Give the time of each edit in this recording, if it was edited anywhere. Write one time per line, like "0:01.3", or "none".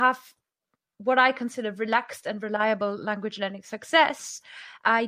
none